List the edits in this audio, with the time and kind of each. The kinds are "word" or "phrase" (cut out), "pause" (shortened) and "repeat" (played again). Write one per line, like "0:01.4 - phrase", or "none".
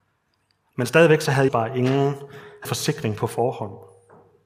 0:01.5 - word
0:02.6 - phrase